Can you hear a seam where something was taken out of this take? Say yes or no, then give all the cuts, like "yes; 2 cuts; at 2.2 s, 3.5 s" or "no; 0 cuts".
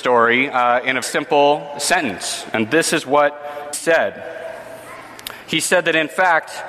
yes; 2 cuts; at 1.0 s, 3.7 s